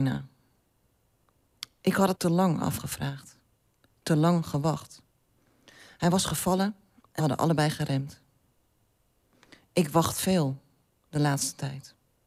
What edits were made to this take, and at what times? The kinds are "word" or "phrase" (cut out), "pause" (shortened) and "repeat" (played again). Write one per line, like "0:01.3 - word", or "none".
0:02.1 - word
0:07.2 - word